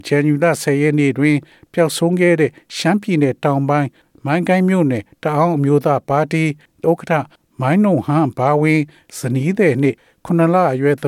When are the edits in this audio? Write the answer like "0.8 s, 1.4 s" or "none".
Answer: 6.8 s